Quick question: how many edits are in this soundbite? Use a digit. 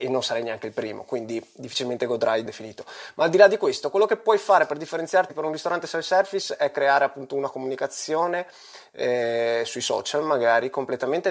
1